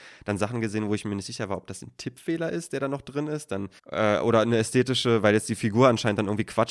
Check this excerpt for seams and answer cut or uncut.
cut